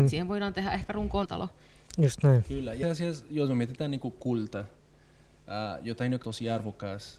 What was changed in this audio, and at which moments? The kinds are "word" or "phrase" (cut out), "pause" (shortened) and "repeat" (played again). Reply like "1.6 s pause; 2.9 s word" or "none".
1.3 s word; 2.8 s word; 6.2 s word